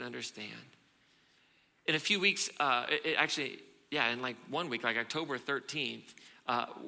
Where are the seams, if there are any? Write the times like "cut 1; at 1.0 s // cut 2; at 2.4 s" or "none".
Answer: none